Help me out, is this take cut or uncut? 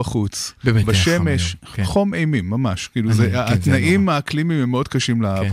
uncut